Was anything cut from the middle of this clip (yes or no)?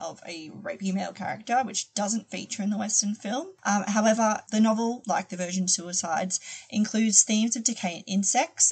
no